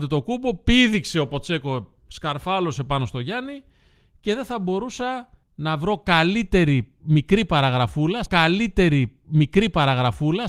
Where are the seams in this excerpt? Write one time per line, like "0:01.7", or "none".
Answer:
0:02.0
0:05.4
0:08.3